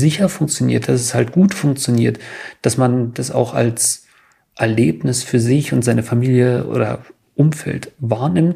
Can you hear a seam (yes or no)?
no